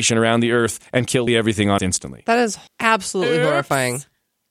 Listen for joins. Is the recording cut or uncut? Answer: cut